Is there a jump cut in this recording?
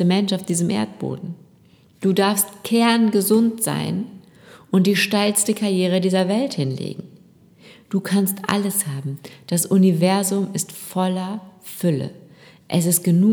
no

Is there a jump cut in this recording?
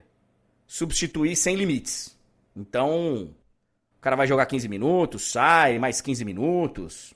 no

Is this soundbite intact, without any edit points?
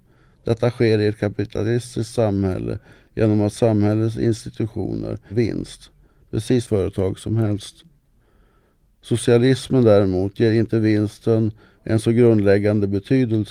no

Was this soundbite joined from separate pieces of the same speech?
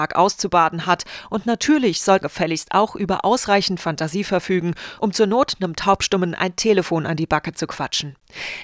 yes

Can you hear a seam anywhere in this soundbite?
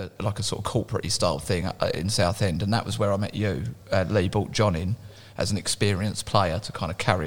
no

